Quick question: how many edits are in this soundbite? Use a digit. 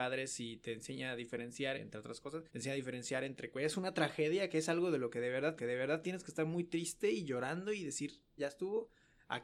4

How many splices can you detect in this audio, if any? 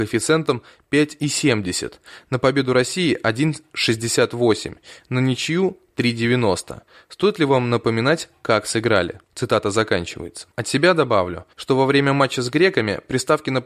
3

